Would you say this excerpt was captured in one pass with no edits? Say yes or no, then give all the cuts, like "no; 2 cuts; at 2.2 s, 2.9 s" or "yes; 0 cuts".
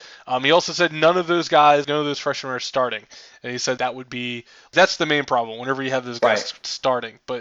no; 2 cuts; at 1.8 s, 3.8 s